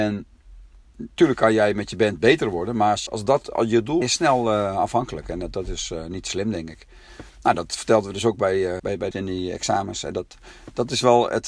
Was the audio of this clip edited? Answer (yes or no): yes